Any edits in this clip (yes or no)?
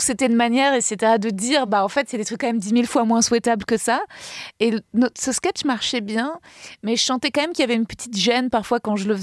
no